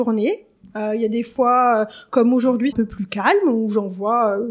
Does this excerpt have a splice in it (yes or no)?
yes